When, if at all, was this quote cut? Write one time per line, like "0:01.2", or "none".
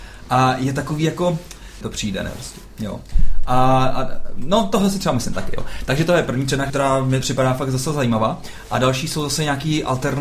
0:01.8
0:06.7
0:07.2